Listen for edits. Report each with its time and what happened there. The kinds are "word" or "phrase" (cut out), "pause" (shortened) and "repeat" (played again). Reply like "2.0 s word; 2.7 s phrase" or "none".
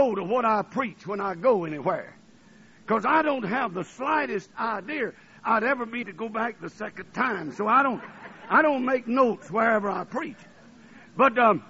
6.0 s word